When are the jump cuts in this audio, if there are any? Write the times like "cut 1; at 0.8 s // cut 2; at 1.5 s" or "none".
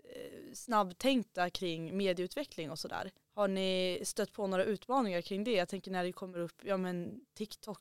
cut 1; at 3.2 s